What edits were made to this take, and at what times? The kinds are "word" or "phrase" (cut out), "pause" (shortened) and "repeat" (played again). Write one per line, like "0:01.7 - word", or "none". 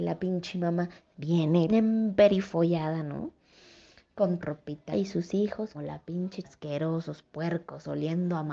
0:01.7 - word
0:04.4 - word
0:04.9 - word
0:05.7 - word
0:06.4 - word